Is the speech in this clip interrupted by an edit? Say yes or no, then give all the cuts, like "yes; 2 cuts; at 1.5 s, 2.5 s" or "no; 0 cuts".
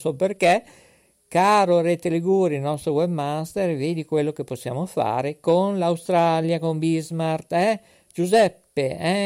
no; 0 cuts